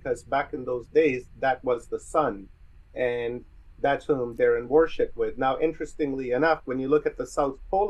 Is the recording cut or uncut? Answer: uncut